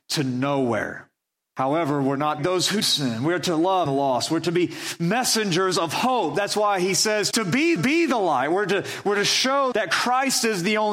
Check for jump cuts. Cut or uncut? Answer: cut